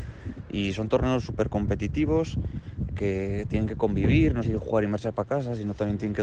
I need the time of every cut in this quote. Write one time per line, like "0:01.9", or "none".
0:02.9
0:04.4